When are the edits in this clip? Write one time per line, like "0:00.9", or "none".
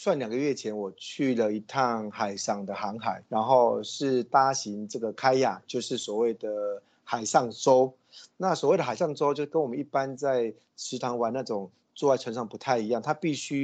0:03.3